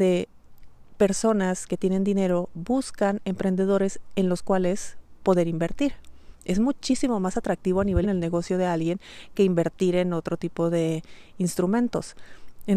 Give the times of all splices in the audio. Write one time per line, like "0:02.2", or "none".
0:08.0